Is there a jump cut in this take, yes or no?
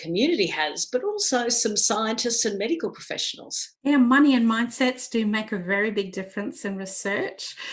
yes